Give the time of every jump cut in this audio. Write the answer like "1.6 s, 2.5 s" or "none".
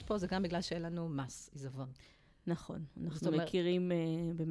none